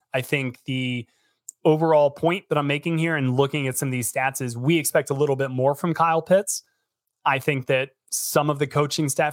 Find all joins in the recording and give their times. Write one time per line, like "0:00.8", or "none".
none